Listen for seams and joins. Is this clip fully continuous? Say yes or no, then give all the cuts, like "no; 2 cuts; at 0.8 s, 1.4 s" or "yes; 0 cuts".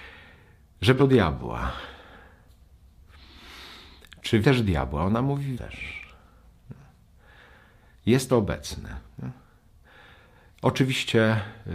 no; 4 cuts; at 1.0 s, 4.4 s, 5.5 s, 8.3 s